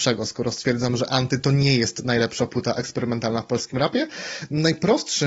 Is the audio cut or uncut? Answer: uncut